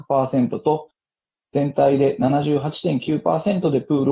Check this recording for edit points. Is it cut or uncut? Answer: uncut